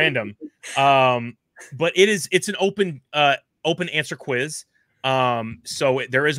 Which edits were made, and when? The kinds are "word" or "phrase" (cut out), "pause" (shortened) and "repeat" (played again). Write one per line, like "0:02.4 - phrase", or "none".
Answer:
none